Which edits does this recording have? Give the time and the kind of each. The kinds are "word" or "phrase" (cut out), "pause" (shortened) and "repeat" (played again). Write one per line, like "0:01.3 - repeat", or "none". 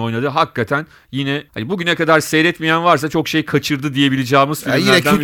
0:01.5 - pause